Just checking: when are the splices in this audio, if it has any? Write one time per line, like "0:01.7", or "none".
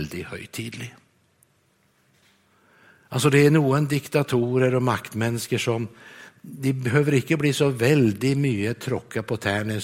none